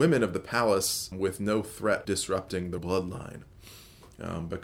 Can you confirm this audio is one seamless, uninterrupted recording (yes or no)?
no